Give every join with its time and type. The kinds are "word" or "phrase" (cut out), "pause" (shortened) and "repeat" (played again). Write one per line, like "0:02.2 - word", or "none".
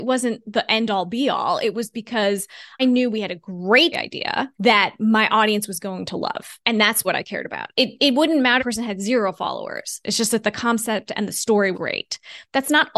0:02.8 - word
0:03.9 - word
0:04.5 - pause
0:06.6 - pause
0:07.0 - word
0:08.6 - phrase
0:11.7 - word